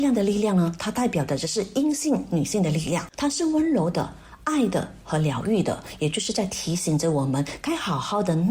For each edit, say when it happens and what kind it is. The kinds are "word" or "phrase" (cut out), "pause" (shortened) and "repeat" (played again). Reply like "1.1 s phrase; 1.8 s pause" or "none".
3.1 s pause